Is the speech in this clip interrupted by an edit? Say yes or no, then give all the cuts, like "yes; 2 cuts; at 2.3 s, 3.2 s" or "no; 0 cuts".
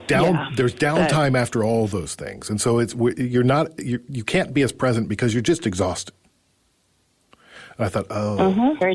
no; 0 cuts